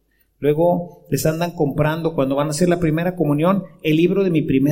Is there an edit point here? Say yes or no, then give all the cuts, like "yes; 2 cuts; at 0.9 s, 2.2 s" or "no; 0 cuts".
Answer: no; 0 cuts